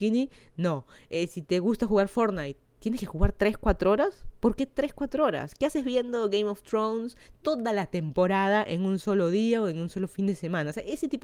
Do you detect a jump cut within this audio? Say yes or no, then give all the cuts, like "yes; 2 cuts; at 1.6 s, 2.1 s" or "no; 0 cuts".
no; 0 cuts